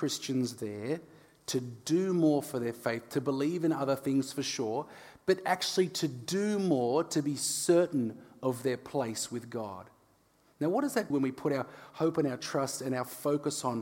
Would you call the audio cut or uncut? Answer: cut